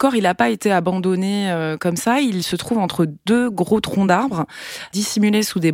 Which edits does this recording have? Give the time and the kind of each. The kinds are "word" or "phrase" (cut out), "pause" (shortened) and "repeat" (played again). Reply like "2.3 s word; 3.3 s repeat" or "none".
none